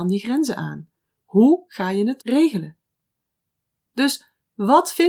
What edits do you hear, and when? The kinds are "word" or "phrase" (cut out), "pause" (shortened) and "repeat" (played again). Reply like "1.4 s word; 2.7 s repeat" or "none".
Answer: 2.2 s word